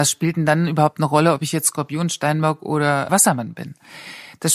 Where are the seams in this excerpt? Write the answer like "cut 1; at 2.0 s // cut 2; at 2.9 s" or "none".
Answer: cut 1; at 3.1 s

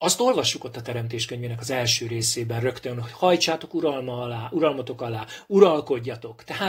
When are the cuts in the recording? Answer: none

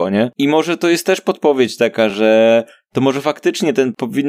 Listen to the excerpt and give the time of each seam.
none

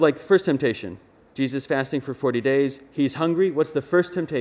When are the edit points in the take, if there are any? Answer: none

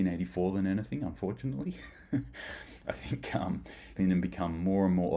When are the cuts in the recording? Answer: cut 1; at 4.0 s

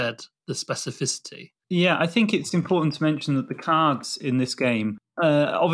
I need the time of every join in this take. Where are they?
none

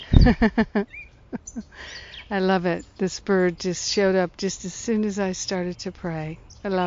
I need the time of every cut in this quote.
cut 1; at 1.1 s

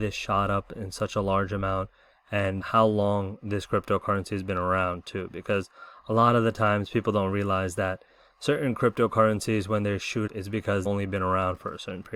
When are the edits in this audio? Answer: cut 1; at 2.6 s // cut 2; at 10.3 s // cut 3; at 10.9 s

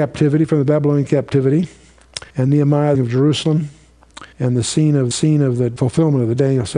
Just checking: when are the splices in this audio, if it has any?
cut 1; at 2.3 s // cut 2; at 2.9 s // cut 3; at 4.3 s // cut 4; at 5.1 s

